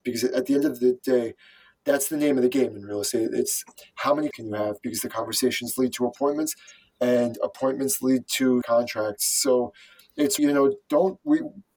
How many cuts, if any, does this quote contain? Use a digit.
3